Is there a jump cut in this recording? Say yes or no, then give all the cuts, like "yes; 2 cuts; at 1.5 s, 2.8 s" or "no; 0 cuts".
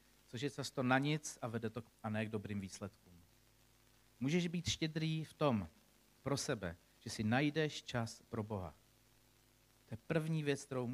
yes; 1 cut; at 1.9 s